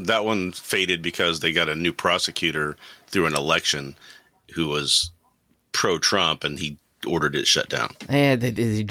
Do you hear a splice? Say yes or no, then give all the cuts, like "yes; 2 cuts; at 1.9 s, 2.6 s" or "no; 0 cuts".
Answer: no; 0 cuts